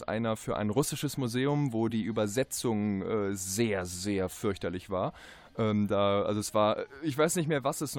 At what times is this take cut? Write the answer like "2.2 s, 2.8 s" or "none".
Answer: none